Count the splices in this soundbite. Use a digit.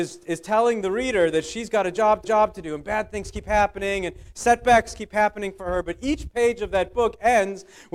1